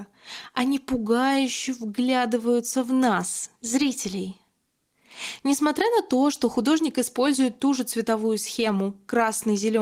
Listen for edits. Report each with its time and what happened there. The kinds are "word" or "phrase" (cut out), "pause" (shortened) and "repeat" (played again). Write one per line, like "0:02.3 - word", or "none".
0:03.6 - pause